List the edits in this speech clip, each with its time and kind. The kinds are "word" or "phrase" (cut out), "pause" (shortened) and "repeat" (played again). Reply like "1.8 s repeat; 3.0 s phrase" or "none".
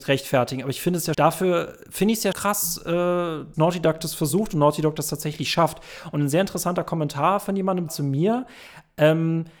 1.1 s word; 2.3 s word; 3.5 s word; 7.9 s word